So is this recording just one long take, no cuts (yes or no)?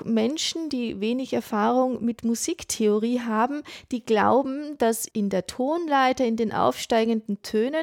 yes